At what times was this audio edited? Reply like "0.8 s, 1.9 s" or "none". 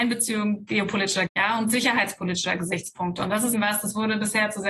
1.3 s, 3.5 s